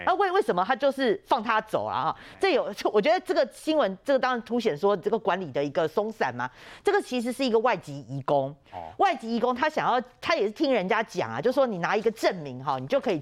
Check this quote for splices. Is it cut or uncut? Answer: uncut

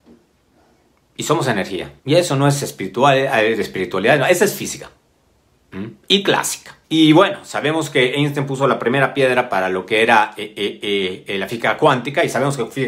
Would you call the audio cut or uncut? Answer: cut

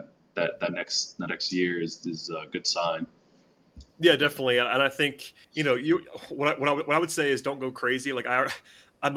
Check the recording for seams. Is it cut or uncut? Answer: cut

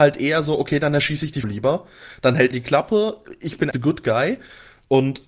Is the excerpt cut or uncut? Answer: cut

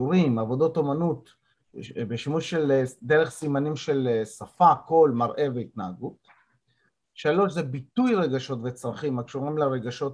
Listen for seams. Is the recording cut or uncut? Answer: uncut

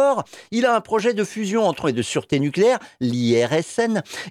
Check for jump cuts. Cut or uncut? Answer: cut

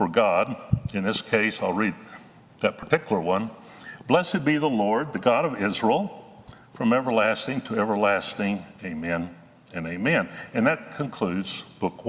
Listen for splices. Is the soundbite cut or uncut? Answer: uncut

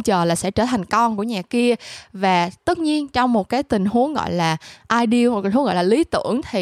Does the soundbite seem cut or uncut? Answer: uncut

